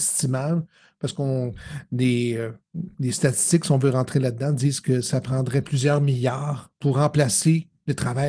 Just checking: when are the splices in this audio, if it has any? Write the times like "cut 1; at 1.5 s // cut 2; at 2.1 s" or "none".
cut 1; at 2.9 s // cut 2; at 6.8 s